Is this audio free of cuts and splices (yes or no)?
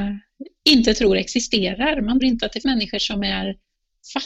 no